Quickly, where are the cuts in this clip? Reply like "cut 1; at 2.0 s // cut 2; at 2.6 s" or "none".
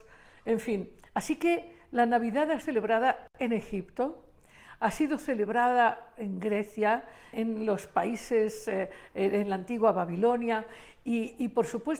cut 1; at 2.6 s // cut 2; at 7.3 s